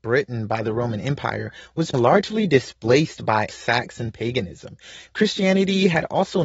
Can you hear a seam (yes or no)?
yes